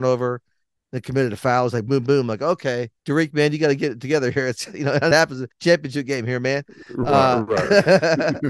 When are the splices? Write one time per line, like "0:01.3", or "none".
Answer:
0:01.9
0:03.0
0:05.1
0:05.5